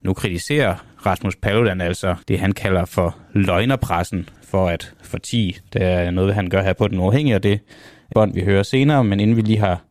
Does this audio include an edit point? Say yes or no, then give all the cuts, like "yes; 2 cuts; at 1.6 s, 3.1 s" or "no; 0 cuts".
yes; 3 cuts; at 2.2 s, 4.4 s, 8.1 s